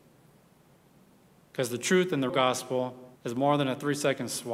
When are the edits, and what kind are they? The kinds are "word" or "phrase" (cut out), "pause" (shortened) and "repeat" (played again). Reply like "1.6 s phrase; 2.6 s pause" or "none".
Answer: 2.3 s word; 3.2 s pause